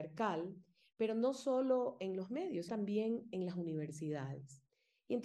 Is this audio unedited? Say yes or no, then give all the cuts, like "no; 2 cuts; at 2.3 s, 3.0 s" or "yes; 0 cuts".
no; 1 cut; at 2.7 s